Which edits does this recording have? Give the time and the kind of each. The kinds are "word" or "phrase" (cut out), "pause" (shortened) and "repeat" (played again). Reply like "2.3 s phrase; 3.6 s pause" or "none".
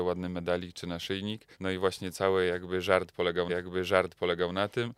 1.5 s pause; 3.5 s repeat